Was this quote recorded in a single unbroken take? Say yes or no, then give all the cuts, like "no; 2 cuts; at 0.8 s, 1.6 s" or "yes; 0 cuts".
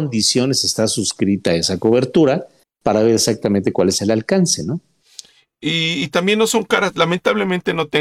yes; 0 cuts